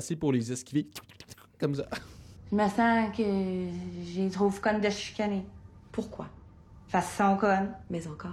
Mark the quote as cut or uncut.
uncut